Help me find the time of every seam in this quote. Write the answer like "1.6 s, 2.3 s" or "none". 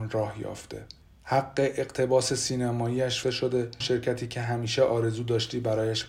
1.0 s, 3.2 s, 3.8 s

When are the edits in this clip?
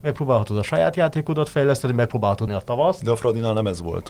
2.5 s

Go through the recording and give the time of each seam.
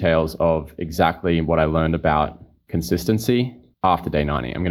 3.7 s

